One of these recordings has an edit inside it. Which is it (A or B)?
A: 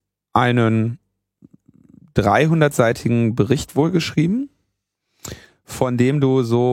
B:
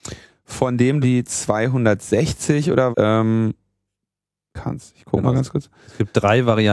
B